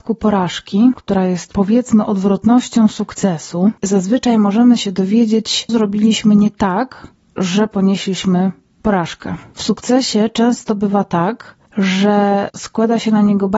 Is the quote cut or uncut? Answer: cut